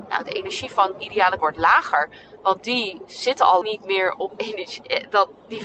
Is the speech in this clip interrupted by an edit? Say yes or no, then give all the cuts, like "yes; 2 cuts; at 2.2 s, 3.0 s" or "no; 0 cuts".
yes; 4 cuts; at 1.0 s, 1.4 s, 3.6 s, 4.3 s